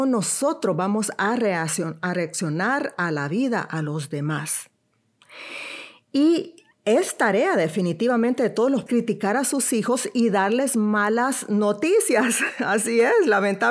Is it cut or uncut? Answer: cut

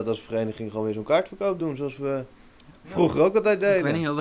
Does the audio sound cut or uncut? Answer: uncut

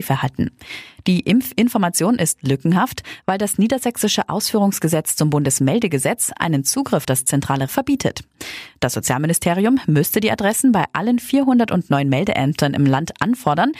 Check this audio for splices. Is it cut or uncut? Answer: cut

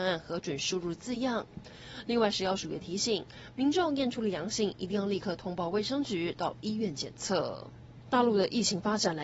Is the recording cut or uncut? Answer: uncut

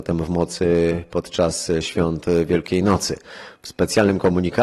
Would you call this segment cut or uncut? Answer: uncut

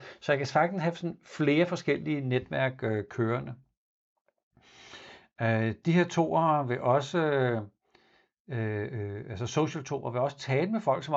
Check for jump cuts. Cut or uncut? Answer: uncut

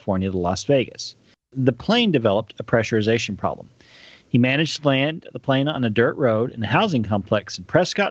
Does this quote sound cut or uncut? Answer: uncut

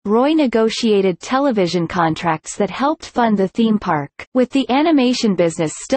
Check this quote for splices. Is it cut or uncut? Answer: cut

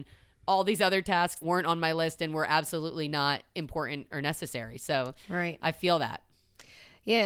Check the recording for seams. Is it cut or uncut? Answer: cut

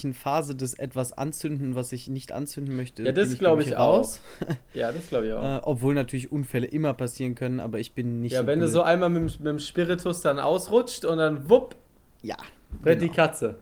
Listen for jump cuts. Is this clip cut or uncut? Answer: uncut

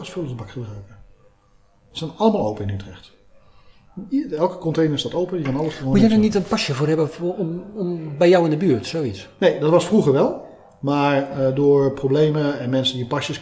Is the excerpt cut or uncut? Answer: uncut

